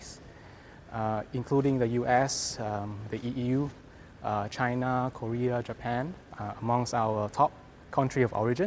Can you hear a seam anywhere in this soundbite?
no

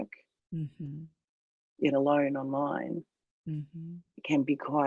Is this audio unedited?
no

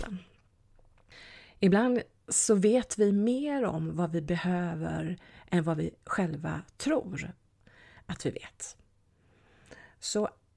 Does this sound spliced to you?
no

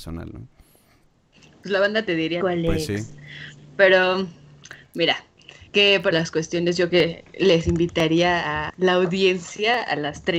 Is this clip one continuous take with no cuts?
no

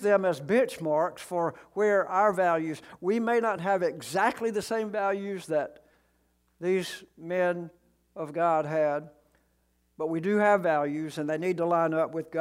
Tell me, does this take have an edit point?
no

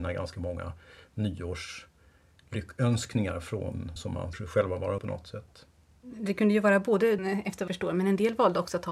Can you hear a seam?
yes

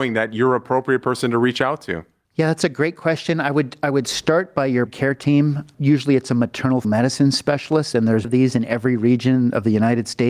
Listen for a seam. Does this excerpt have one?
yes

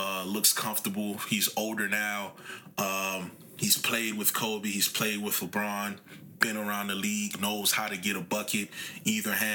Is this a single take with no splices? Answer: yes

